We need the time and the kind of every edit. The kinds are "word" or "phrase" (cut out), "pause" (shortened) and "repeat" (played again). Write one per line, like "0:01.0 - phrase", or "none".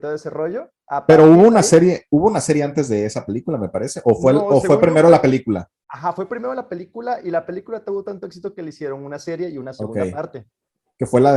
none